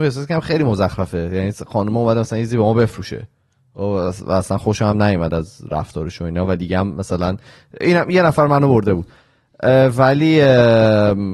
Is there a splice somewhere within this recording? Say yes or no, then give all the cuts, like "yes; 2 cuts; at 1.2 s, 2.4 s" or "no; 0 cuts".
no; 0 cuts